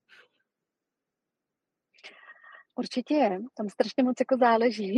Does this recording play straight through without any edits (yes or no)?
yes